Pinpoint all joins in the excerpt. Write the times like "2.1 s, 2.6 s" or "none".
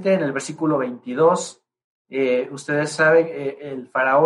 none